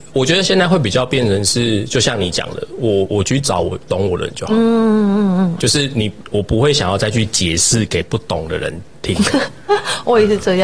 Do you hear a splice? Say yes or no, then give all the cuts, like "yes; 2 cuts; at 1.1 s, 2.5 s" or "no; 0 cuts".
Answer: yes; 1 cut; at 5.6 s